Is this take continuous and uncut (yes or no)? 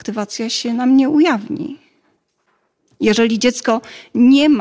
yes